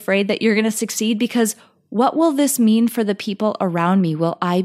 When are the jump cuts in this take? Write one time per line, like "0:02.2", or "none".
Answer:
none